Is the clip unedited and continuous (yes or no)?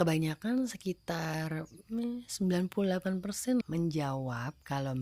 no